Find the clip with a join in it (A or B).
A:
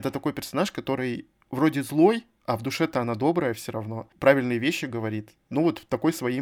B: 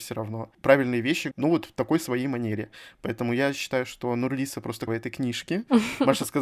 B